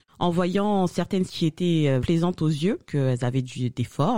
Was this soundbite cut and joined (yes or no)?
yes